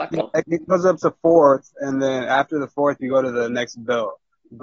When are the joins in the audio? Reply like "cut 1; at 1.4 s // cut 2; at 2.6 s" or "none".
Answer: none